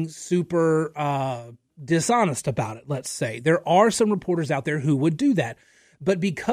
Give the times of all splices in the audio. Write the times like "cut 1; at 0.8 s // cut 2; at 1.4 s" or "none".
none